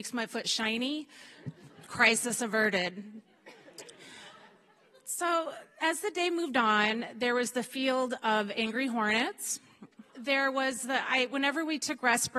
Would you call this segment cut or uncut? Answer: cut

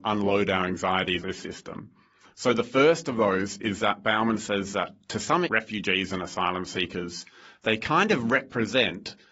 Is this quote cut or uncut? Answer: cut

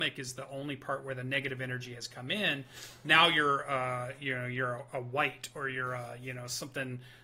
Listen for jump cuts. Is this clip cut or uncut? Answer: uncut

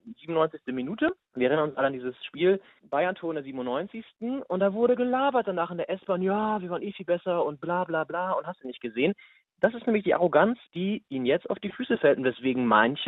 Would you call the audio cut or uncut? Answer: uncut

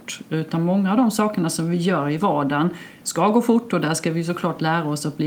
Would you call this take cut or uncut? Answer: uncut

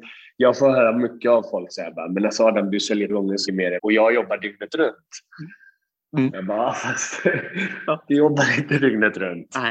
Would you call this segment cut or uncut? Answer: cut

